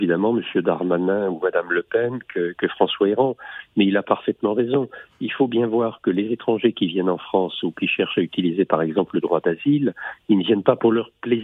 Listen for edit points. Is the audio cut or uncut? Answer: uncut